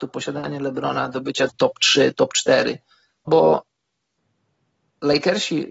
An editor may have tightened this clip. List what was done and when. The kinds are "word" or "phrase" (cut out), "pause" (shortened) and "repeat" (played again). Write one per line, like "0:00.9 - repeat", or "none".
0:01.5 - word
0:03.3 - word